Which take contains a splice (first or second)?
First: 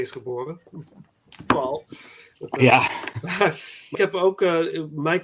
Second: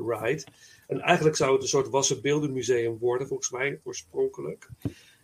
first